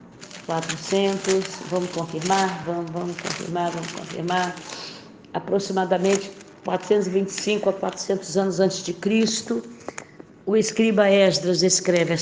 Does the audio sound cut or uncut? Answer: uncut